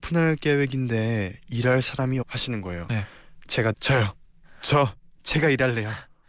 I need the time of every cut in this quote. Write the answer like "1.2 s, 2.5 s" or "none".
2.2 s, 3.7 s